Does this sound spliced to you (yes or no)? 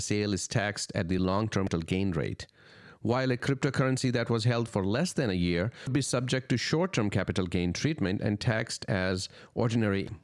no